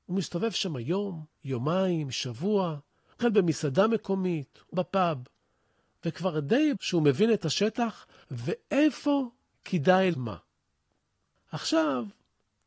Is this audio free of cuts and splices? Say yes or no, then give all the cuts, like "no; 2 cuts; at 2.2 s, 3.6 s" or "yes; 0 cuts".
no; 5 cuts; at 1.3 s, 3.2 s, 4.7 s, 6.8 s, 10.1 s